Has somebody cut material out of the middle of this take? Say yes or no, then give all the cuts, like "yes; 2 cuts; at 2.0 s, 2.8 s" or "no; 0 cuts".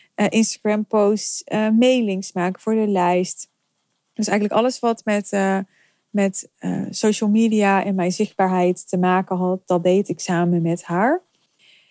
no; 0 cuts